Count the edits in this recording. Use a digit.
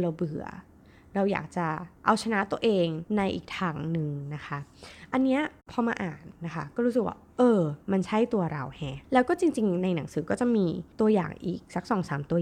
5